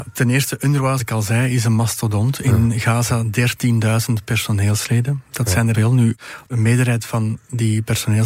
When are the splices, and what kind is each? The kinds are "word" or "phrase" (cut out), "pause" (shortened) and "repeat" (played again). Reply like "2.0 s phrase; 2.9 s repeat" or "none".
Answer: 1.0 s word; 5.7 s word; 6.5 s word